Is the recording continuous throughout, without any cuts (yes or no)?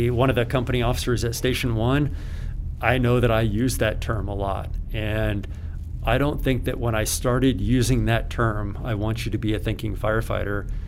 yes